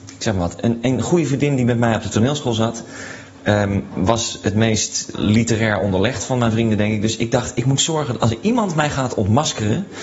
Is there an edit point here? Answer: no; 0 cuts

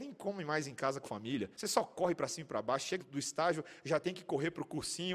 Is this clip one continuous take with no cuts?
no; 3 cuts; at 1.0 s, 1.5 s, 3.0 s

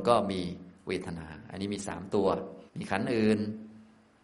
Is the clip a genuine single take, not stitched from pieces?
no; 1 cut; at 2.7 s

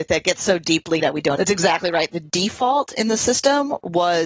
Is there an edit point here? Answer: yes; 2 cuts; at 1.0 s, 1.4 s

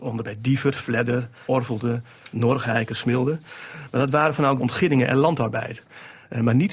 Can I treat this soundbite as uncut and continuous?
no; 2 cuts; at 1.5 s, 4.6 s

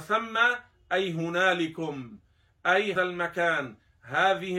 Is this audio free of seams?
no; 1 cut; at 3.0 s

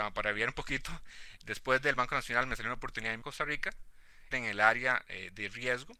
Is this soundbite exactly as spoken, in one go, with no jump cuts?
no; 2 cuts; at 3.2 s, 4.3 s

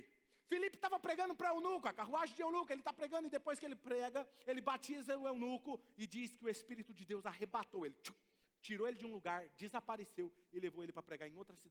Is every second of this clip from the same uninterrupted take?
yes; 0 cuts

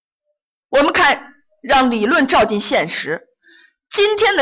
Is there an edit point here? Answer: no; 0 cuts

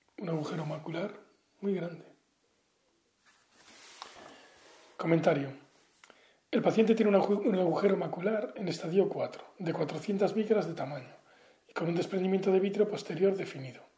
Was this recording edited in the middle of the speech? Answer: no; 0 cuts

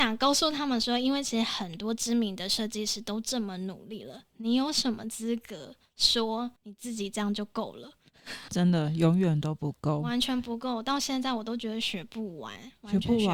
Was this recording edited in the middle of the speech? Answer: yes; 2 cuts; at 6.6 s, 8.5 s

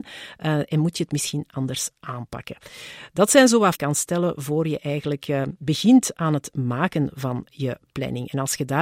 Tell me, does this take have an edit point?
yes; 1 cut; at 3.8 s

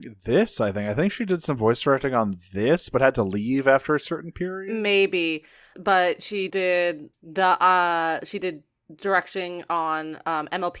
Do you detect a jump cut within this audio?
yes; 3 cuts; at 5.7 s, 6.5 s, 7.1 s

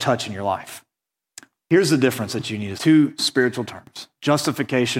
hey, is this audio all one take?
no; 1 cut; at 2.8 s

